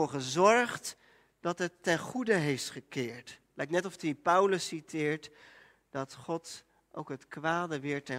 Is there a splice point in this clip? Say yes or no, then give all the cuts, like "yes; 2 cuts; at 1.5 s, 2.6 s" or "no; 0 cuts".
no; 0 cuts